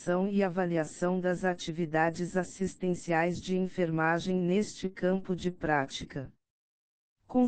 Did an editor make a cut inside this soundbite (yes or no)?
no